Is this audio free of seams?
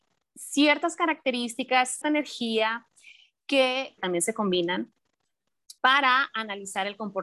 no; 3 cuts; at 2.0 s, 4.0 s, 5.8 s

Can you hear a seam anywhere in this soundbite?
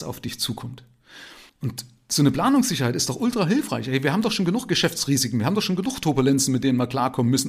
no; 0 cuts

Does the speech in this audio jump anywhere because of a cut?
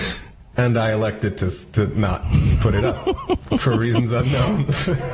no; 0 cuts

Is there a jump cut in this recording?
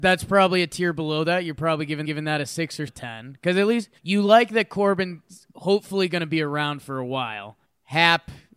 yes; 5 cuts; at 2.0 s, 2.9 s, 4.0 s, 5.5 s, 7.6 s

